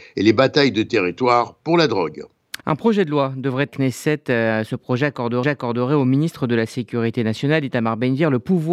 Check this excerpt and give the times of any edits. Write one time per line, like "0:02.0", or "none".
0:02.6
0:03.7
0:05.4